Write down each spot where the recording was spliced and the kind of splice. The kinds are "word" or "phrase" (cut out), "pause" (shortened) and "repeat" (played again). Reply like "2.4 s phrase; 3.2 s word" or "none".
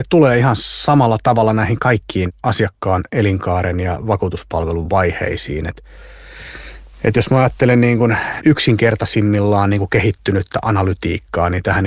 6.9 s pause